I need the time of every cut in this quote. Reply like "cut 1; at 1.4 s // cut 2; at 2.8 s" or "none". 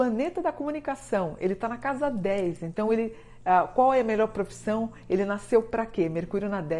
none